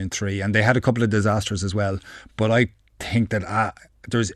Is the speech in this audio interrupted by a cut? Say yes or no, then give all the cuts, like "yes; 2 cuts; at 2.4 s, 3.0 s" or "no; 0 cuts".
no; 0 cuts